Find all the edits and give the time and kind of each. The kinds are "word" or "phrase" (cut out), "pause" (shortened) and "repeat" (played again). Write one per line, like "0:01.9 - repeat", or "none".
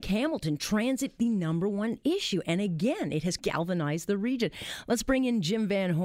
0:01.2 - word
0:03.4 - word